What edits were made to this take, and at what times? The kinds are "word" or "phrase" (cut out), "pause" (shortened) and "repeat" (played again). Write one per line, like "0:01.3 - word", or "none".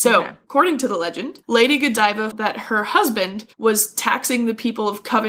0:01.4 - pause
0:02.3 - word
0:03.5 - pause